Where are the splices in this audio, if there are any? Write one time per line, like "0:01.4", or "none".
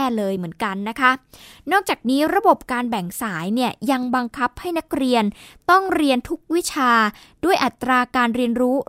none